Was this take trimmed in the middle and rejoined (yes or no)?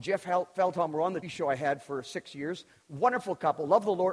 yes